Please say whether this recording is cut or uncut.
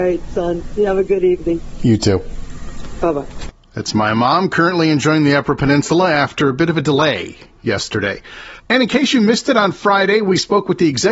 cut